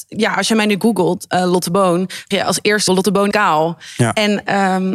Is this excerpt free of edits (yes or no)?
no